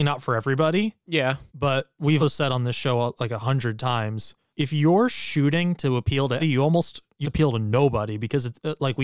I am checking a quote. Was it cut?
yes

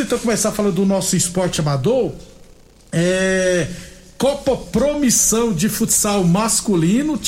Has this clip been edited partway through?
no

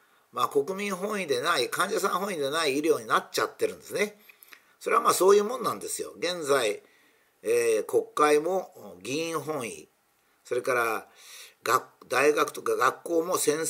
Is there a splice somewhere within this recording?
no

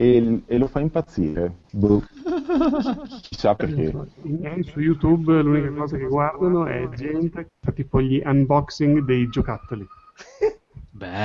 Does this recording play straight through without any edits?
no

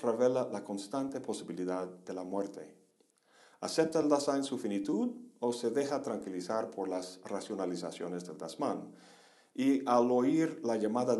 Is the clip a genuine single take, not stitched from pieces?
yes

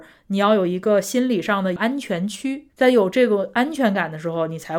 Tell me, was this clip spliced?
yes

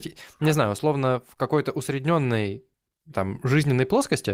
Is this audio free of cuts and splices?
yes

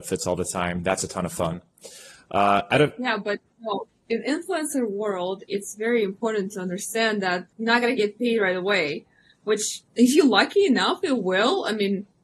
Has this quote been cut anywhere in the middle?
yes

